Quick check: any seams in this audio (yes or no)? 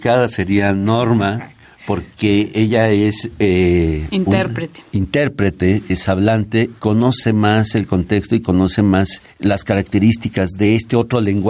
yes